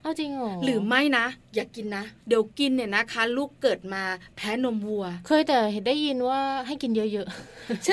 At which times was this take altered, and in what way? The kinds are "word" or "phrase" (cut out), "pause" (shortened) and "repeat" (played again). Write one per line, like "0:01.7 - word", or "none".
0:02.2 - pause